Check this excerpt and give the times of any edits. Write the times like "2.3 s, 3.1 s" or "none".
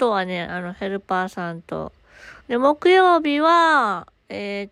2.4 s